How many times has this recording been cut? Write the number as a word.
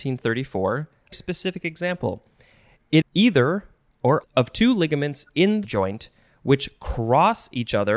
four